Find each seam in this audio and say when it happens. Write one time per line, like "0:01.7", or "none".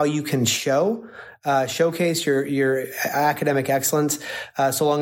none